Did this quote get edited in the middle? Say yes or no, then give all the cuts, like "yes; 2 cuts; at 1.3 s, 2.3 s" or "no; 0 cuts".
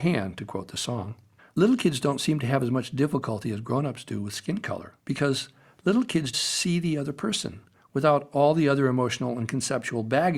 yes; 3 cuts; at 1.4 s, 5.0 s, 6.3 s